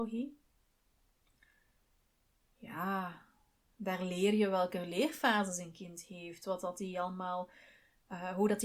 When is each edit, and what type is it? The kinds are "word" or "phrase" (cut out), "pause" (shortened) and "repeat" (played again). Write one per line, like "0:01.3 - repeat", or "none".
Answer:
none